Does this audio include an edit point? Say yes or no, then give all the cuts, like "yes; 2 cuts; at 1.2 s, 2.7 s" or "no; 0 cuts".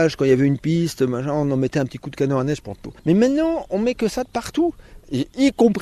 no; 0 cuts